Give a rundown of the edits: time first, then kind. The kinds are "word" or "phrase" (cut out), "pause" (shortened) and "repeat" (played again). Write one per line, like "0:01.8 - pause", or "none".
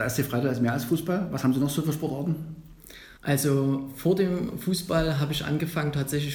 0:03.2 - pause